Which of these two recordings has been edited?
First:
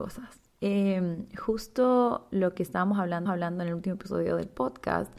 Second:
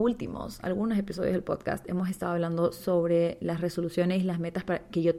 first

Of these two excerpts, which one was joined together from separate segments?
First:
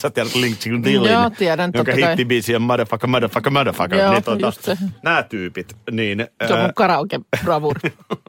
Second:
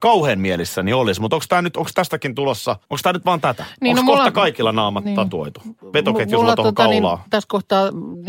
second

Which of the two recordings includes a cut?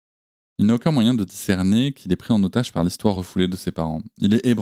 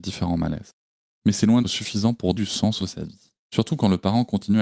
second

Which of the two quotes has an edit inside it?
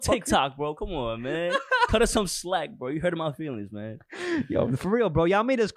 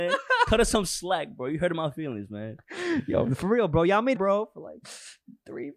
second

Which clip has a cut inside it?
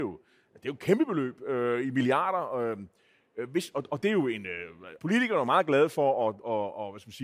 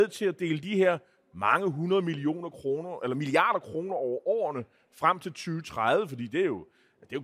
first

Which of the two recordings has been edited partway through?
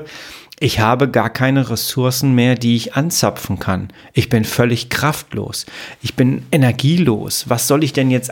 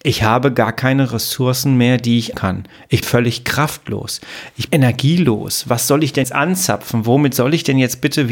second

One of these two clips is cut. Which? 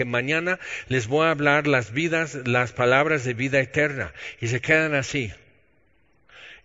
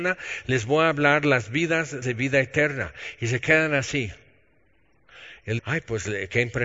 second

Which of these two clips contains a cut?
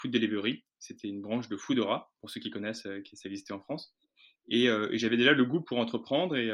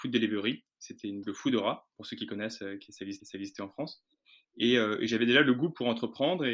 second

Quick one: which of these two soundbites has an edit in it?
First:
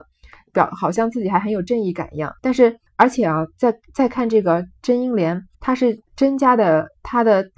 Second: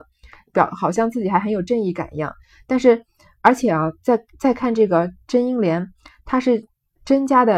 first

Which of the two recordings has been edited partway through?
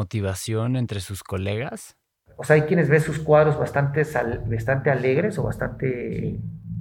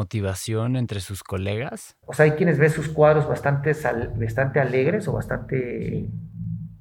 second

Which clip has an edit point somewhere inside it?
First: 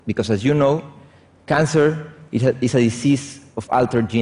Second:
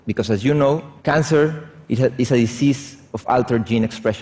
second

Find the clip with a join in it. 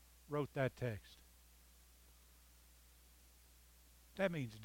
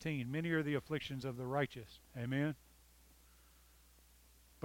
second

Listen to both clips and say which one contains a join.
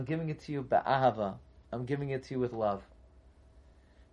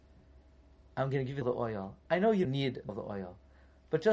second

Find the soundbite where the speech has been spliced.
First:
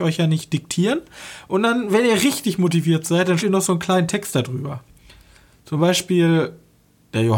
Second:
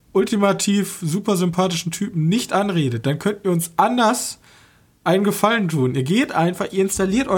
first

